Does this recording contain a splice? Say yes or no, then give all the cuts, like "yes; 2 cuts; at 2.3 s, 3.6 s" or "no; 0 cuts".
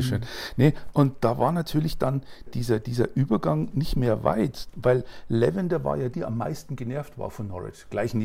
yes; 3 cuts; at 0.9 s, 2.5 s, 6.1 s